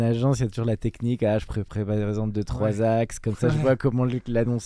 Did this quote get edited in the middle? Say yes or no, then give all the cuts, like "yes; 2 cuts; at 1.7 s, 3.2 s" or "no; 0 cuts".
no; 0 cuts